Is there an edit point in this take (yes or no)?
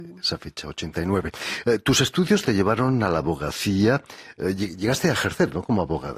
yes